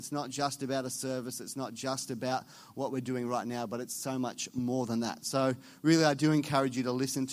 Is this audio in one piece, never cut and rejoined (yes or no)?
yes